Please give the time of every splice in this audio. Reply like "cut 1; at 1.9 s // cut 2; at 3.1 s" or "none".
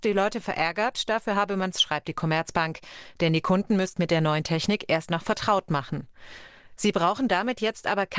cut 1; at 1.7 s // cut 2; at 4.0 s